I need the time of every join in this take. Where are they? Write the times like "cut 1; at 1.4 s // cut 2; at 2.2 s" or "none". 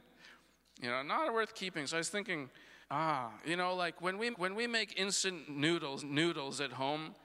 cut 1; at 2.8 s // cut 2; at 4.3 s // cut 3; at 6.0 s